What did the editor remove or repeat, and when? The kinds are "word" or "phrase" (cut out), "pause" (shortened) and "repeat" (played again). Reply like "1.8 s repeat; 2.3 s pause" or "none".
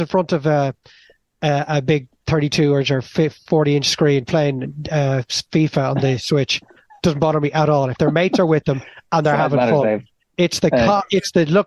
none